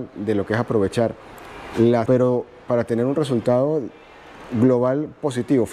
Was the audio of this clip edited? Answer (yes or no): yes